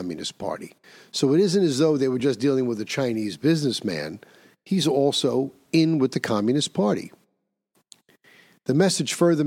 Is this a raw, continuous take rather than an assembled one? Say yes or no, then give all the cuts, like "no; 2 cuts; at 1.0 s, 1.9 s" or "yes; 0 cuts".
yes; 0 cuts